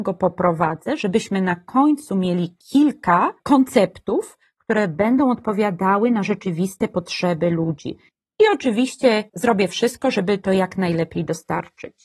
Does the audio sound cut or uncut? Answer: uncut